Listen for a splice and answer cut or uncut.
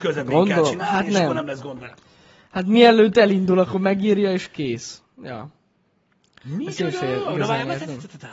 uncut